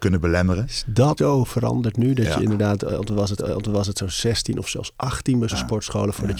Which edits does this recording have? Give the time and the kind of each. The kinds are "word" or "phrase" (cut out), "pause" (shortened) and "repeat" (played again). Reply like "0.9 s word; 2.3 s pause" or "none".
1.2 s word; 3.4 s repeat; 5.5 s word